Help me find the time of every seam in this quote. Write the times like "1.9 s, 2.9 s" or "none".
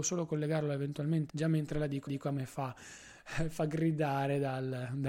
1.3 s, 2.1 s